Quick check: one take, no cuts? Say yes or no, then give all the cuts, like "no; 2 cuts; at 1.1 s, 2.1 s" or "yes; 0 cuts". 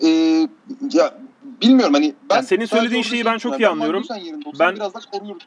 no; 1 cut; at 1.3 s